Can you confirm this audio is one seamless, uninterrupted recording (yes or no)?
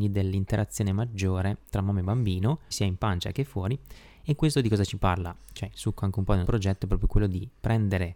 no